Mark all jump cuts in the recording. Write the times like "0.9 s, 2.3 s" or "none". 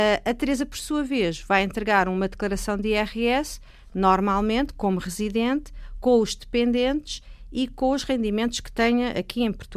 none